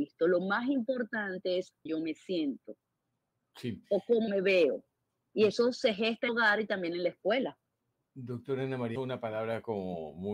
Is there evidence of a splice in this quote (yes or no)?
yes